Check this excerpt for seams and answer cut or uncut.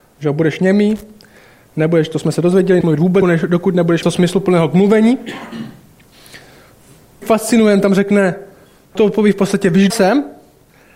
cut